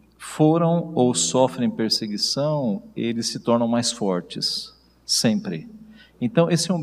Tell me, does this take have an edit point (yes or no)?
no